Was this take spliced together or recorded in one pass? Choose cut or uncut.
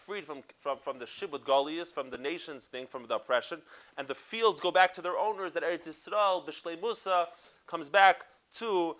uncut